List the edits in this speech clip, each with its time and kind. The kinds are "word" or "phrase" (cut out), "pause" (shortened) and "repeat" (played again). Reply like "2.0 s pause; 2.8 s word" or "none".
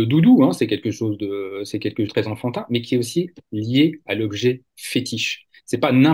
2.1 s phrase